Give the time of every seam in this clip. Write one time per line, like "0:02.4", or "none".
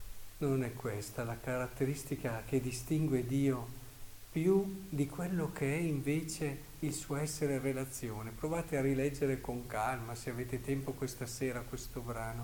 none